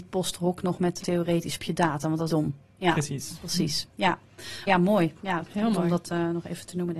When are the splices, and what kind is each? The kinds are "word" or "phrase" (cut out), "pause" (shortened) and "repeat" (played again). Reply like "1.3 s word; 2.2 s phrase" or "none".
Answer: 1.0 s word; 1.6 s phrase; 2.3 s phrase; 4.7 s word